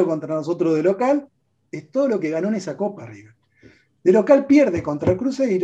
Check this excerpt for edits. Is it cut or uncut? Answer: uncut